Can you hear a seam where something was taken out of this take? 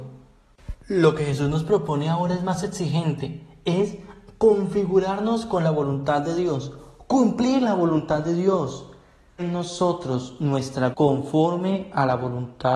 yes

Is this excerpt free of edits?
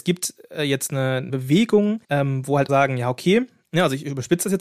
no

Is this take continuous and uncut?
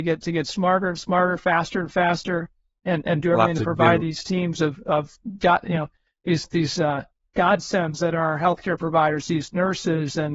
yes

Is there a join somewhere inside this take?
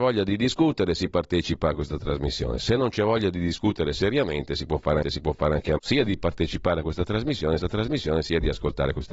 yes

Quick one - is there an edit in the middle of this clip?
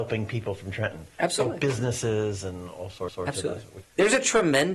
yes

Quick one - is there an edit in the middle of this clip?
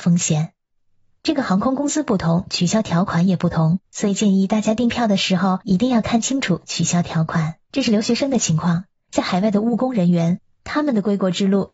yes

